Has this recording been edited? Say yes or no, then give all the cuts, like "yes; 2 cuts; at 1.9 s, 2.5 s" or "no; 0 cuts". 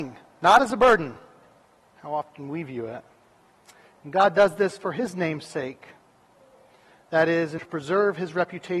yes; 1 cut; at 7.6 s